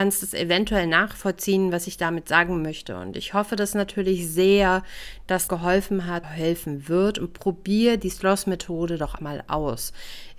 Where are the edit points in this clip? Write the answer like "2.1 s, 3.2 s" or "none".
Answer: 5.5 s, 6.2 s, 9.2 s